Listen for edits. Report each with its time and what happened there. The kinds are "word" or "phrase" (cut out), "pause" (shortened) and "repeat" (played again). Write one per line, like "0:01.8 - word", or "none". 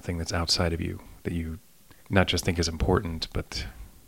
0:02.0 - pause